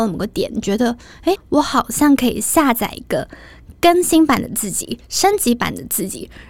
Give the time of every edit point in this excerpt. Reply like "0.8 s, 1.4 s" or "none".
1.4 s